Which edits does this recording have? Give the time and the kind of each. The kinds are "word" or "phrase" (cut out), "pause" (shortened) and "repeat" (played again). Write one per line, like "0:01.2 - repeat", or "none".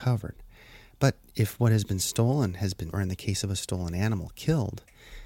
0:02.9 - word